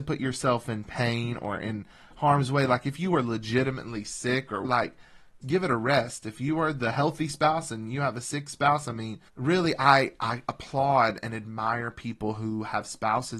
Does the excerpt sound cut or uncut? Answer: cut